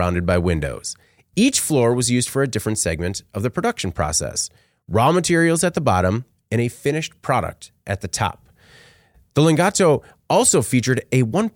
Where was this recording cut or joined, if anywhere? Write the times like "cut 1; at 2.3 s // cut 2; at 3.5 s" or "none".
none